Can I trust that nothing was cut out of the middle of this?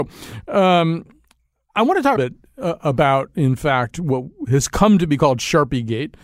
no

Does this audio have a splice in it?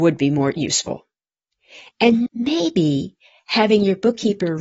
yes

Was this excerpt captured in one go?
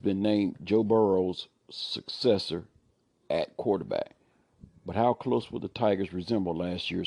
yes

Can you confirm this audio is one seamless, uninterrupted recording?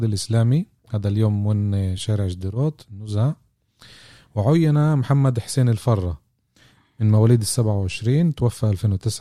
yes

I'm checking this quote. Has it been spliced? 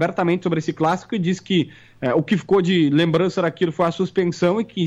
no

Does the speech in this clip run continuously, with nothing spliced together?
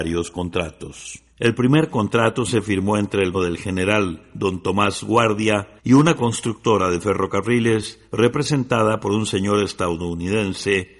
no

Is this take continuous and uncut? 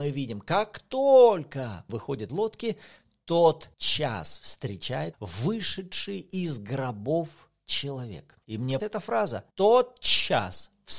no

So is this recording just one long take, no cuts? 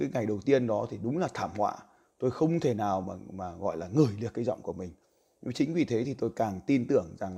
yes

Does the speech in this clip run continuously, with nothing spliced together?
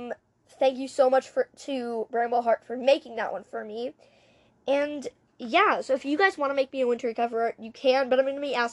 yes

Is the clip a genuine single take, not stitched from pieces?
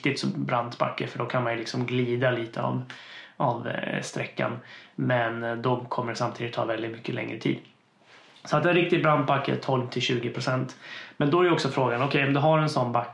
yes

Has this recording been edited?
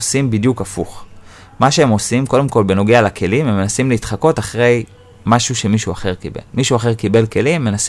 no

